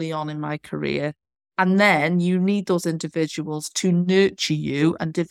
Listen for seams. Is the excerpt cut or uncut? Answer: uncut